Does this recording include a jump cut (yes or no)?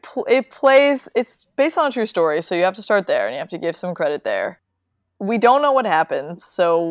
no